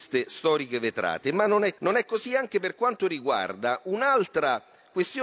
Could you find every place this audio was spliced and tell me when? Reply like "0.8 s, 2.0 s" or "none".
1.8 s